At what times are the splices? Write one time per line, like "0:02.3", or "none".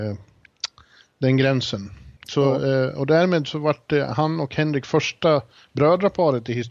0:02.2